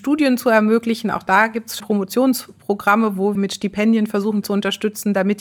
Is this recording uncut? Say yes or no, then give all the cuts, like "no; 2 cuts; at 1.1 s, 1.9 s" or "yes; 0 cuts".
no; 3 cuts; at 1.8 s, 3.4 s, 4.4 s